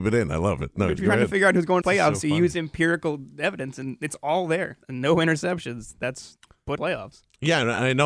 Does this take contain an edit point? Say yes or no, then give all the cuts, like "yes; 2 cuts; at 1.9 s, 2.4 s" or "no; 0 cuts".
yes; 4 cuts; at 1.0 s, 1.8 s, 4.8 s, 6.8 s